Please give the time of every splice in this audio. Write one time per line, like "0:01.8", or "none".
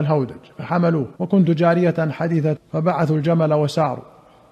0:01.2
0:02.6